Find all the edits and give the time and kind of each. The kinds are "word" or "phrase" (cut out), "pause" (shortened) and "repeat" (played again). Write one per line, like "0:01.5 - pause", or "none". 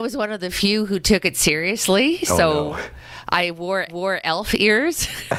0:03.9 - repeat